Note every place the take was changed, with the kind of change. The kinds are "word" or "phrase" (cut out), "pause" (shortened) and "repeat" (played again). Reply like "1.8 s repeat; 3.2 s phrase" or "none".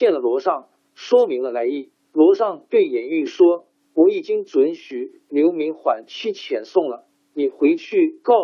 2.0 s pause